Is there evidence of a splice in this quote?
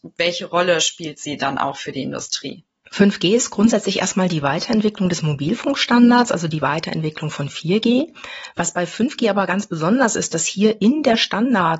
no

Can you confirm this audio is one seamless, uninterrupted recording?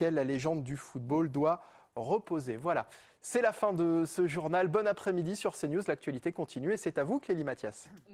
yes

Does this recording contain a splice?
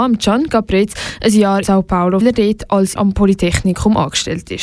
yes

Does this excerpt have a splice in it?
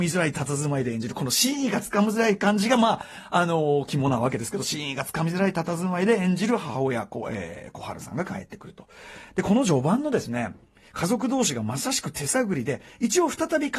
no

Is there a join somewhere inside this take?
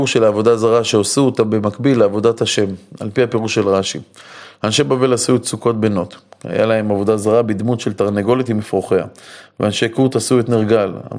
no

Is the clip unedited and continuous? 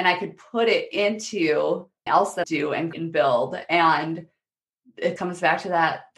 no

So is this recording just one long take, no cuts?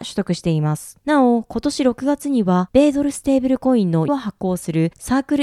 no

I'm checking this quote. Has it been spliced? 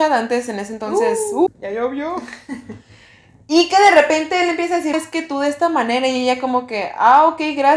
yes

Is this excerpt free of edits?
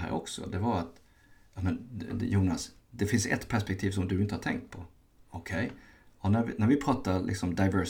yes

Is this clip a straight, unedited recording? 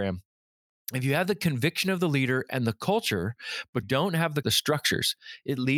no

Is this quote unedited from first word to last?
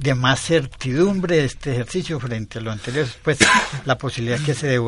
yes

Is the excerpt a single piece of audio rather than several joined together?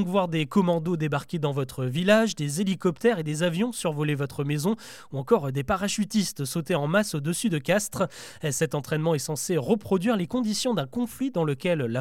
yes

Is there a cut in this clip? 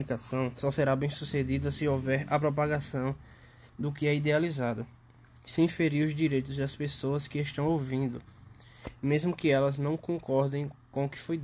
no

